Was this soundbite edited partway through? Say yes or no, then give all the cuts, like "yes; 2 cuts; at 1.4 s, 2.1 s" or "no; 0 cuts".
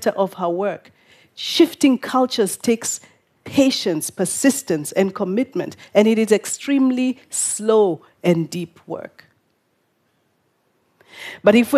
no; 0 cuts